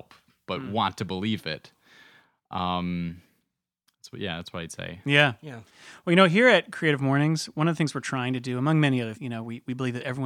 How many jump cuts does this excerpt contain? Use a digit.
1